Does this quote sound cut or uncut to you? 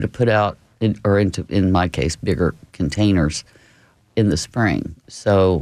uncut